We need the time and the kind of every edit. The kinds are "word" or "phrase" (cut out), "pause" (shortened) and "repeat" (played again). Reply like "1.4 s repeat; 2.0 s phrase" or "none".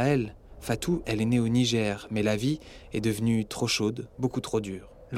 1.0 s word; 4.1 s pause